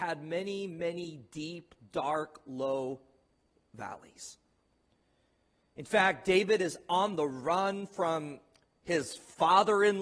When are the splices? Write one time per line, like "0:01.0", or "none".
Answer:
none